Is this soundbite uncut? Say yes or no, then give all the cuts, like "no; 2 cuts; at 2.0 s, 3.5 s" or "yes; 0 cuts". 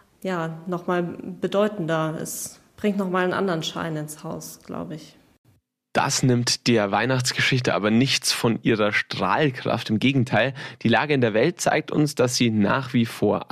yes; 0 cuts